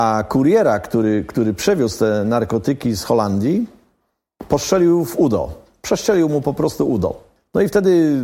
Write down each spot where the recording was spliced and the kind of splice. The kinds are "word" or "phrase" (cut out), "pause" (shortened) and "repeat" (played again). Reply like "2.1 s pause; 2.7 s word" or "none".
none